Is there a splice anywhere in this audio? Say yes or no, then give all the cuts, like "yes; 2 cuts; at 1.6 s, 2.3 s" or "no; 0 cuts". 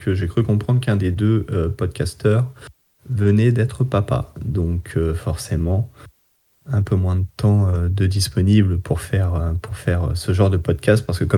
no; 0 cuts